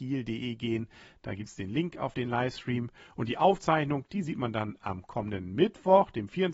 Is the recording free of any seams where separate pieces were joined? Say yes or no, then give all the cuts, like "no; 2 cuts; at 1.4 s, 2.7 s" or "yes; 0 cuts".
yes; 0 cuts